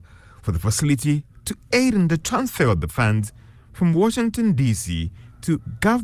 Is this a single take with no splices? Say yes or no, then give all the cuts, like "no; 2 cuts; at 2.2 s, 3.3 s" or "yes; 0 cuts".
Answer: yes; 0 cuts